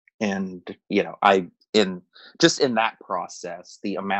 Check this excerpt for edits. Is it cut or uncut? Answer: uncut